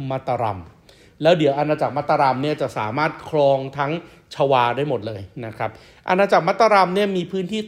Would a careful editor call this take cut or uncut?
uncut